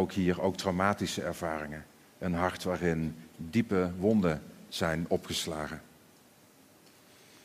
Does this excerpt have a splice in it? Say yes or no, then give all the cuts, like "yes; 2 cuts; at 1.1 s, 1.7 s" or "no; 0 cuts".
no; 0 cuts